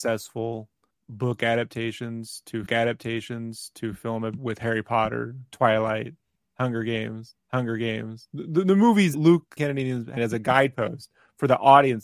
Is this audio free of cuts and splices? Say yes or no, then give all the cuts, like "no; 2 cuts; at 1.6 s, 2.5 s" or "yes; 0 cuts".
no; 7 cuts; at 0.9 s, 2.7 s, 4.4 s, 7.4 s, 9.1 s, 9.6 s, 10.2 s